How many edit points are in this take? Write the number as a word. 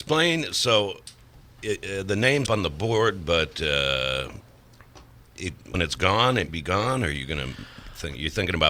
three